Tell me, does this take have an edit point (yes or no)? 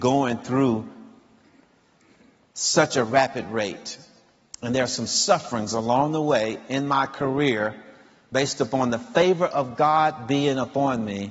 no